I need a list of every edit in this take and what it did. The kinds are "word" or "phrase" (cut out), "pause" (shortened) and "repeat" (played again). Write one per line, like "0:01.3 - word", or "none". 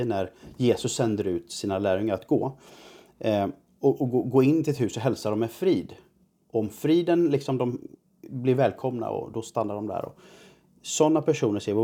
none